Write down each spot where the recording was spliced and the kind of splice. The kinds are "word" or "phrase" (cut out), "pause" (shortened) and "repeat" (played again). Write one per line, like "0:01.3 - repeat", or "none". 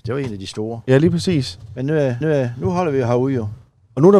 0:02.2 - repeat